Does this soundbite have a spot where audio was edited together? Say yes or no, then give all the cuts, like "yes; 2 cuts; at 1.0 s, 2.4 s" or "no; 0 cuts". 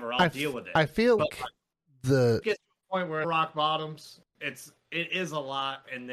yes; 4 cuts; at 1.2 s, 1.8 s, 2.4 s, 3.2 s